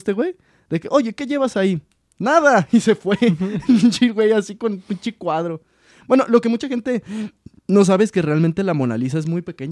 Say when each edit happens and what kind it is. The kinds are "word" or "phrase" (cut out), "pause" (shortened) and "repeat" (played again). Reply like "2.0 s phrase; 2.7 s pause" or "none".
none